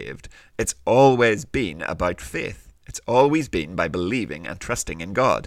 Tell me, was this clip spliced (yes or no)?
yes